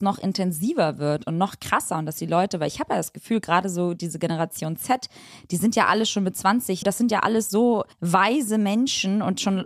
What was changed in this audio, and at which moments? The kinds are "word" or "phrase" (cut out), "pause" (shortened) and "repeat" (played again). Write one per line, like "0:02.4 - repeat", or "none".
0:06.8 - word
0:07.9 - pause